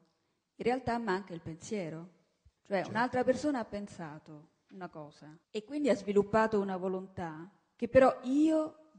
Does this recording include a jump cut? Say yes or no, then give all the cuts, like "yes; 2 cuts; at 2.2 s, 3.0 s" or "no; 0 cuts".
yes; 2 cuts; at 2.6 s, 5.4 s